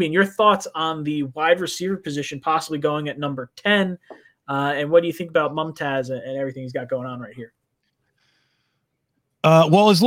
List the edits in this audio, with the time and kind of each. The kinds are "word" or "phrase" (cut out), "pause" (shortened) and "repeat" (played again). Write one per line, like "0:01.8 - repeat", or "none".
none